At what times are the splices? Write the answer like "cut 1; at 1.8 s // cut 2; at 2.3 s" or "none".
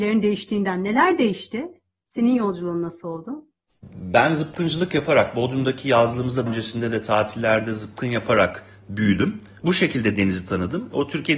cut 1; at 6.5 s

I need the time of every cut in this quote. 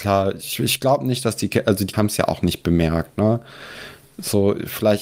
cut 1; at 1.9 s

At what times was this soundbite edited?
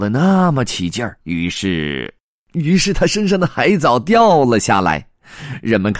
cut 1; at 1.2 s

